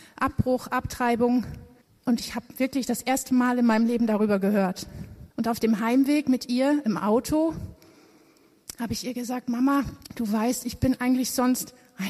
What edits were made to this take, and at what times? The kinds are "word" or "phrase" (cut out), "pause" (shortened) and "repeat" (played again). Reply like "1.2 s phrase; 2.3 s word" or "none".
1.8 s pause; 5.3 s pause; 10.0 s pause